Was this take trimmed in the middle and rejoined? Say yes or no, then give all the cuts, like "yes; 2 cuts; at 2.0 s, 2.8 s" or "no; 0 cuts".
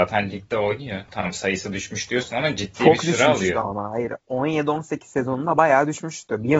yes; 1 cut; at 4.2 s